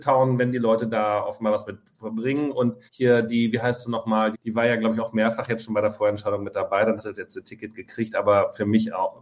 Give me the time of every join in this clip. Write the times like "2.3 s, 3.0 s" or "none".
2.9 s, 4.3 s, 7.0 s